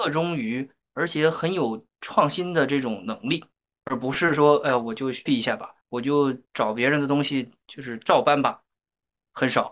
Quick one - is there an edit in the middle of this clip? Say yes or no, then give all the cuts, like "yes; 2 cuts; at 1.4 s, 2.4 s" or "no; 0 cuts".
yes; 4 cuts; at 3.5 s, 5.3 s, 5.8 s, 6.5 s